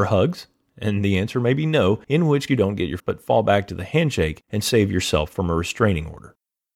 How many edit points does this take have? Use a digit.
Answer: 4